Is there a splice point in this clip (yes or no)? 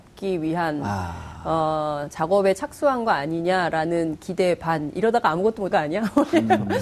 yes